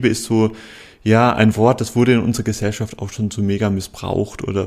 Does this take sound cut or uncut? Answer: uncut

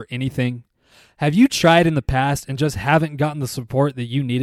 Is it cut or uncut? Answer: uncut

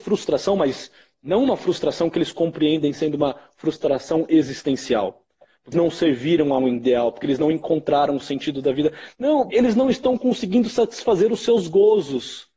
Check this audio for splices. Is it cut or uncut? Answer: cut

